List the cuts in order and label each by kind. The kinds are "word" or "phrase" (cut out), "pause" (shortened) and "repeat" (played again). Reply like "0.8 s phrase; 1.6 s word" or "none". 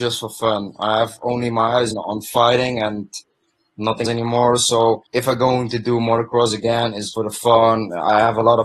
1.9 s word; 4.0 s word; 5.1 s pause; 7.1 s word